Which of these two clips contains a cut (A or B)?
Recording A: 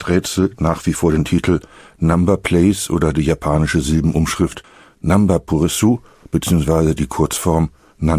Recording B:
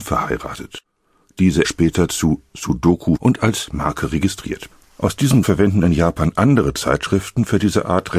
B